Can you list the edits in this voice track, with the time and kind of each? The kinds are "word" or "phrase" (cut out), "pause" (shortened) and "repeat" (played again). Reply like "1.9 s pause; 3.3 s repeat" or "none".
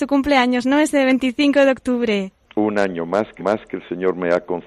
3.4 s repeat